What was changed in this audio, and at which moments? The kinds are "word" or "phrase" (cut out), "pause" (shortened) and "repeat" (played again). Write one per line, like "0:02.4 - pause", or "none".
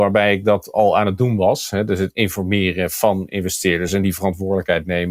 none